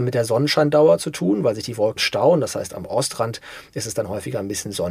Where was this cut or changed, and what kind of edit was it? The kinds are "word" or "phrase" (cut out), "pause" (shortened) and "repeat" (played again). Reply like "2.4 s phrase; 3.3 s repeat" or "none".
2.0 s phrase